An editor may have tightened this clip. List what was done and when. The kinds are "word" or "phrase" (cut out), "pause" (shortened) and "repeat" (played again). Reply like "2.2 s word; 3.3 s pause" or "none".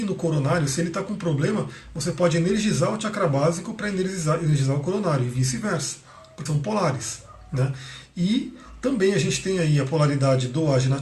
6.5 s word